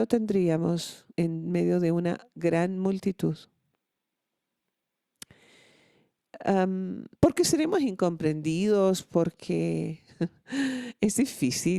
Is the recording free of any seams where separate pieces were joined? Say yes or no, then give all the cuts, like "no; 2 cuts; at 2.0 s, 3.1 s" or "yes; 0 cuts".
no; 2 cuts; at 1.1 s, 7.1 s